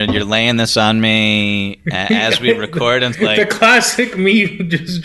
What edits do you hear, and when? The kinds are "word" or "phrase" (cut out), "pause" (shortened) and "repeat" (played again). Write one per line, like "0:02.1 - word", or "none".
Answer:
0:03.1 - phrase

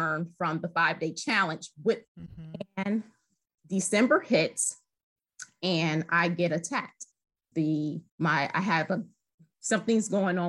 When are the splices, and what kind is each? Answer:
0:02.1 - word
0:07.5 - word
0:08.1 - pause

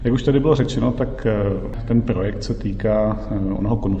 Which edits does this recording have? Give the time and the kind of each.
none

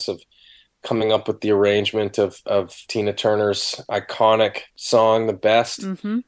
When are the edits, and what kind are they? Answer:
0:02.8 - pause
0:04.7 - pause

